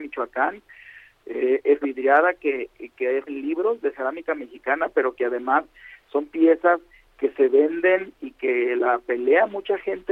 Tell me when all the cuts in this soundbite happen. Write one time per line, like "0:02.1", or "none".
0:01.8
0:03.3